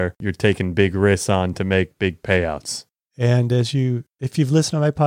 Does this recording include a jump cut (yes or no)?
no